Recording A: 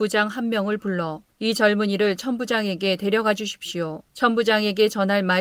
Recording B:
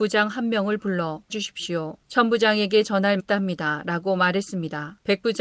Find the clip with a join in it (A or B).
B